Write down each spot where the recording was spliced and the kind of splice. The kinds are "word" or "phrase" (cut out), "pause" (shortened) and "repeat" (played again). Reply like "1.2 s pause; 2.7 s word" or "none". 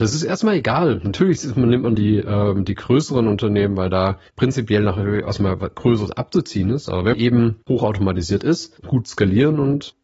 2.0 s word; 4.3 s pause; 7.1 s word; 7.6 s pause; 8.8 s phrase